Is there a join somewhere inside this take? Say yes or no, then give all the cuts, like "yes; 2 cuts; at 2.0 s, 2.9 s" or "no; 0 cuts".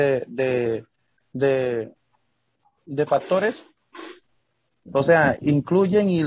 no; 0 cuts